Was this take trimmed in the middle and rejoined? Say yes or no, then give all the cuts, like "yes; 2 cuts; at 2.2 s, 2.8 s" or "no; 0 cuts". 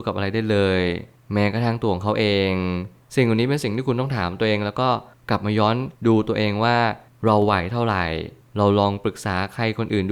yes; 1 cut; at 5.9 s